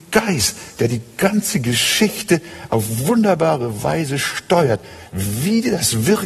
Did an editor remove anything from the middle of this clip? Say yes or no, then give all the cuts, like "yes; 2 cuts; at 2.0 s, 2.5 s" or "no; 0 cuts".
no; 0 cuts